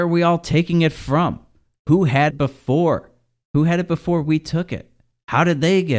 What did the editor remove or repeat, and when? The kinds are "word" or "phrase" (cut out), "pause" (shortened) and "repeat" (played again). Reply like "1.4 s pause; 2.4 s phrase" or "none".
2.3 s word